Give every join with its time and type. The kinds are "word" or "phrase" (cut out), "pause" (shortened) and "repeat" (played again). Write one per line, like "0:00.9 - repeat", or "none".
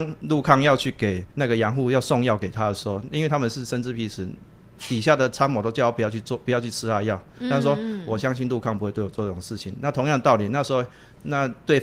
0:01.3 - pause